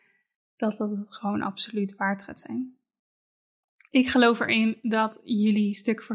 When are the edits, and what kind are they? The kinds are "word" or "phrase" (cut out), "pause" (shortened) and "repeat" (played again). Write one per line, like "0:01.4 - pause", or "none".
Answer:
none